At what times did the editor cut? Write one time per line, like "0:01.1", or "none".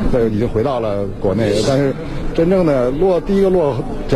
0:02.3